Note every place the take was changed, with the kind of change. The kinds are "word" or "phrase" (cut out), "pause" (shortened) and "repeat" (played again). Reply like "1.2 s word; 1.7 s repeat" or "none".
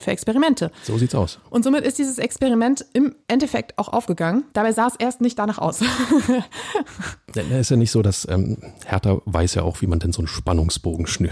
3.2 s pause; 4.5 s pause